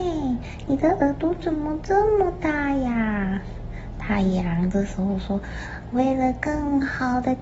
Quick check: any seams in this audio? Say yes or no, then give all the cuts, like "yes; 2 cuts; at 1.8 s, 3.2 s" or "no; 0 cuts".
no; 0 cuts